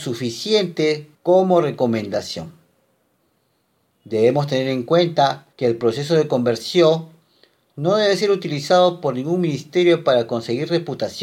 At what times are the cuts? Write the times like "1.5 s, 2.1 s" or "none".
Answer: 1.1 s, 5.5 s